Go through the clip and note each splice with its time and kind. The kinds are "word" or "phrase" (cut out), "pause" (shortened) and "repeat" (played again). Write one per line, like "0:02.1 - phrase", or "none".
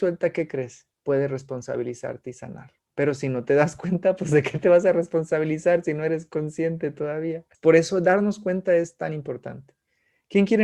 0:00.9 - pause
0:02.8 - pause
0:07.5 - pause